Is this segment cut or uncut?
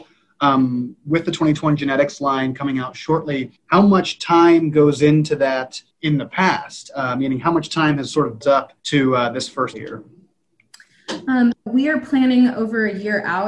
cut